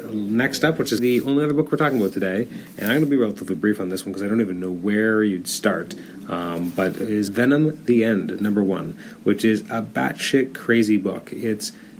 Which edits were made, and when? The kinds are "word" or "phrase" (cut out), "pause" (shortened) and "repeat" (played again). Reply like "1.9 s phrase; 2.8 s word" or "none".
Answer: 1.0 s word; 7.3 s word